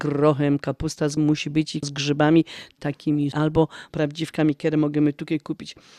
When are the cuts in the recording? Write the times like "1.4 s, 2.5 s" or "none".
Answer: 1.2 s, 1.8 s, 2.8 s, 3.3 s, 3.9 s